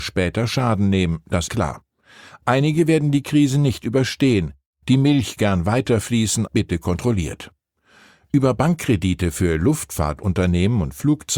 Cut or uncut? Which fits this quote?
cut